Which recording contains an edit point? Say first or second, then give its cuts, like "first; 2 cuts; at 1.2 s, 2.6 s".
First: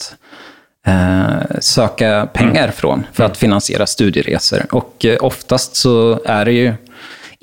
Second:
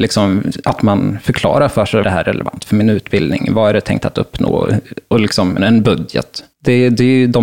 second; 3 cuts; at 2.0 s, 5.6 s, 6.5 s